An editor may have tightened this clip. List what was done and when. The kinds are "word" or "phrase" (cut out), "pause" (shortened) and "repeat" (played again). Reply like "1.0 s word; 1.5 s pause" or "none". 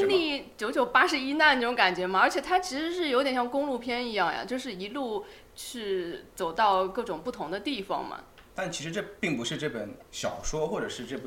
8.5 s pause